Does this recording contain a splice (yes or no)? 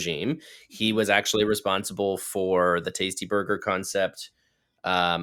no